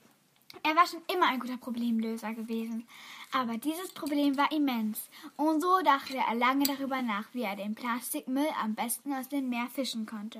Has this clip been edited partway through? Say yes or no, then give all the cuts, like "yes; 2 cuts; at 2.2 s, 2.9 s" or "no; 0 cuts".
no; 0 cuts